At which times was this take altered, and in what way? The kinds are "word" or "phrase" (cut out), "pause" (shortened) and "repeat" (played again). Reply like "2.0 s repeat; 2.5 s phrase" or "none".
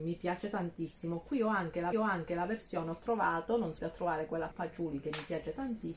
1.9 s repeat; 3.8 s word; 4.5 s word